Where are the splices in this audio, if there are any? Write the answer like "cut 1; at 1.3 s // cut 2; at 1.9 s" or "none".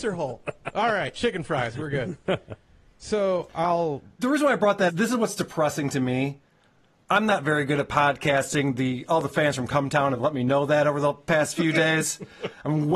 cut 1; at 4.9 s